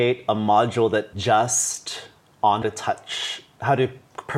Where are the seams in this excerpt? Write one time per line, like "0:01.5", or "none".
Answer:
0:01.1
0:02.6

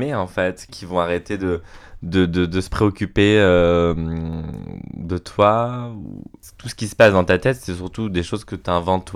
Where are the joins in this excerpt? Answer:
none

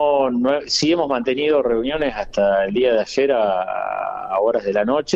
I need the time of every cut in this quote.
none

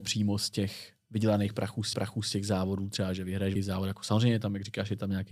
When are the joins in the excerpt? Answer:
0:01.9
0:03.6

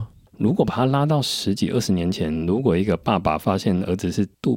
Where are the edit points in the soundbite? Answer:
none

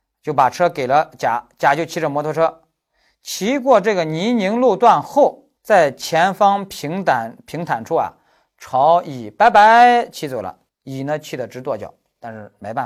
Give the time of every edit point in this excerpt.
0:05.6
0:10.7

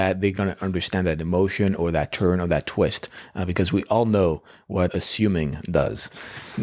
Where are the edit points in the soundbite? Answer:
0:04.9

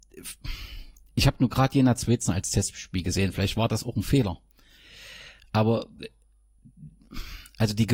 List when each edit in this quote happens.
none

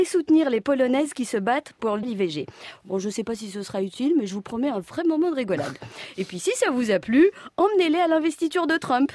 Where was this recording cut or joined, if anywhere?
0:02.0

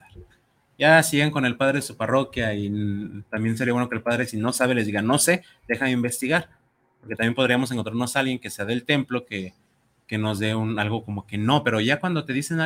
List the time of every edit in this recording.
none

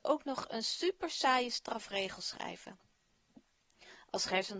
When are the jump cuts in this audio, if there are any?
none

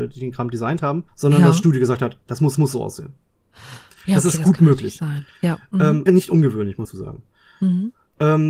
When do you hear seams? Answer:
0:01.1
0:02.5
0:06.1
0:06.8

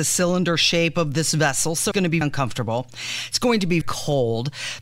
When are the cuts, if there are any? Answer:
0:01.9
0:02.2
0:03.8

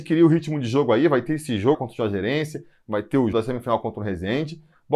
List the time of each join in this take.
0:01.7
0:03.3

